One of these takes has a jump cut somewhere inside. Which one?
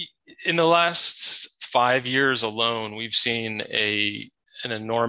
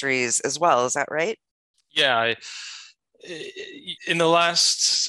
second; 2 cuts; at 1.7 s, 4.0 s

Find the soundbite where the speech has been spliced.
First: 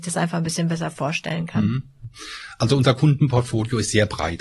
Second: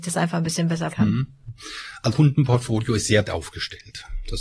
second; 3 cuts; at 0.9 s, 2.1 s, 3.2 s

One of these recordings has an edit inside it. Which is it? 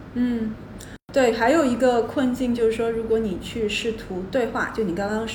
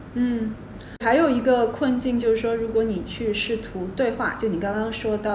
second; 1 cut; at 1.0 s

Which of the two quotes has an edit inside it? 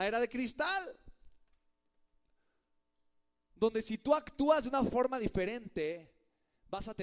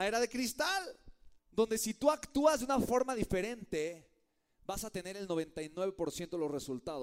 second; 1 cut; at 1.4 s

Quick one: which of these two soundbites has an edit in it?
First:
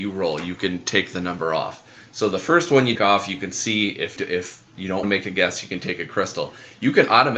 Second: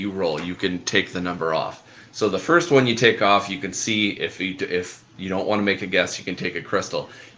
first; 3 cuts; at 3.0 s, 4.2 s, 5.0 s

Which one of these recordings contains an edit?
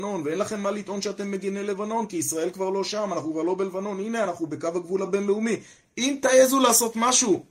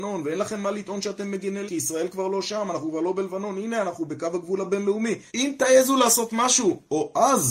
second; 2 cuts; at 1.7 s, 5.3 s

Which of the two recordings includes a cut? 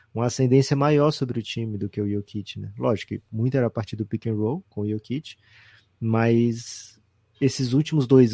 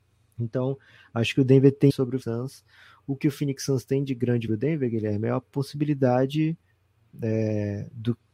second; 3 cuts; at 1.9 s, 2.2 s, 4.5 s

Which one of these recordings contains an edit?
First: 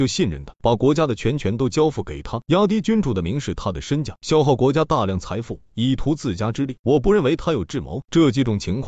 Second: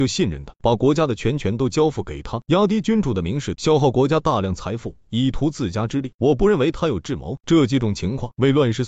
second; 1 cut; at 3.5 s

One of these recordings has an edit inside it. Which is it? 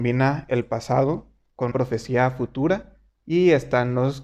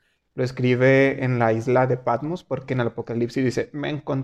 first; 1 cut; at 1.7 s

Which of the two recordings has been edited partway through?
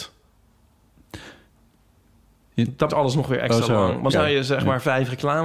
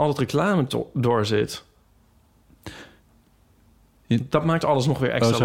first; 2 cuts; at 2.9 s, 4.1 s

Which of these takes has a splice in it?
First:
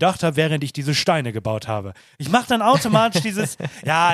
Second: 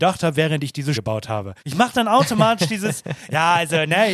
second; 2 cuts; at 0.9 s, 1.6 s

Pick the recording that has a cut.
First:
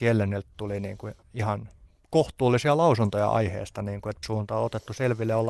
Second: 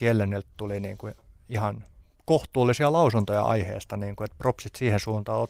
first; 2 cuts; at 1.2 s, 4.2 s

